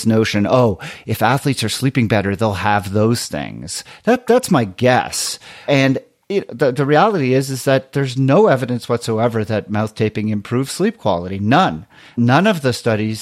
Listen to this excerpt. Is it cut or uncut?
uncut